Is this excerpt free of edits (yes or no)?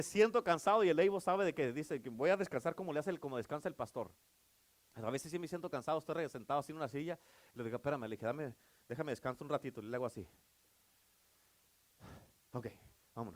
yes